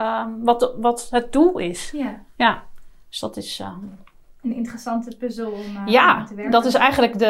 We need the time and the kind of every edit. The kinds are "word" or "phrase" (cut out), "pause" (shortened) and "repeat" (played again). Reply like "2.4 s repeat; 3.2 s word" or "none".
none